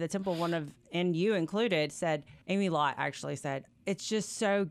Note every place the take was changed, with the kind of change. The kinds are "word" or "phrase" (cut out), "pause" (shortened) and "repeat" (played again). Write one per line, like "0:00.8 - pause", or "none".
0:02.4 - pause